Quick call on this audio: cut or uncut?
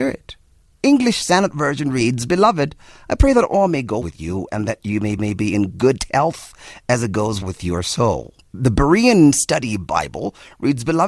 cut